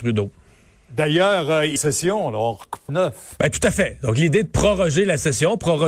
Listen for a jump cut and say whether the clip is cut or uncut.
cut